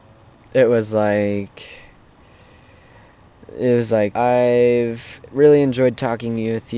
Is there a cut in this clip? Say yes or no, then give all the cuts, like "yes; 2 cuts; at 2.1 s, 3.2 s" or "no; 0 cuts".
yes; 1 cut; at 4.1 s